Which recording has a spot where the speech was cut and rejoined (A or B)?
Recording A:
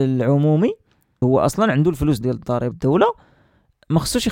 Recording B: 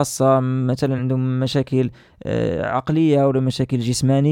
A